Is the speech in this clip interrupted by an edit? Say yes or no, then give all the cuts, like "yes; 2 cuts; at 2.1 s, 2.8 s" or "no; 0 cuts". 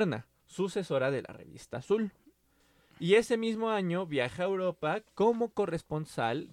no; 0 cuts